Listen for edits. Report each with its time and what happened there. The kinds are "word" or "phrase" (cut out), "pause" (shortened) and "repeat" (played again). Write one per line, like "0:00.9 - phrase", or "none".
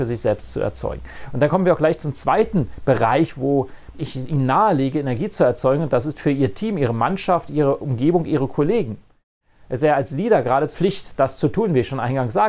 0:03.9 - word
0:10.7 - word